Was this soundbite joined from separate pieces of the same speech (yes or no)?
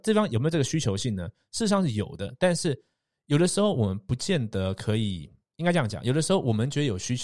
no